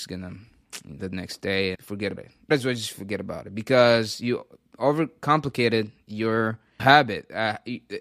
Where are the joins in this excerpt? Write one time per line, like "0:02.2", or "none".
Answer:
0:01.0
0:01.7
0:02.2
0:02.5
0:06.8